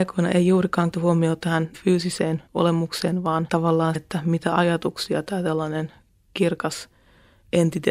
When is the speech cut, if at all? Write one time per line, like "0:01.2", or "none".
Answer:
0:00.9
0:01.7
0:02.5
0:03.5
0:03.9